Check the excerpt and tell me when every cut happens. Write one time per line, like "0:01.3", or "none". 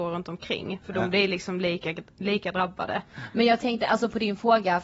none